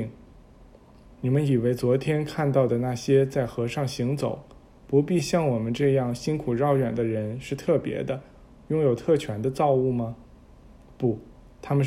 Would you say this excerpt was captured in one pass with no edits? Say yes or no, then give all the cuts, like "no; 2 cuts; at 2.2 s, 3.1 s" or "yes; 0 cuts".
yes; 0 cuts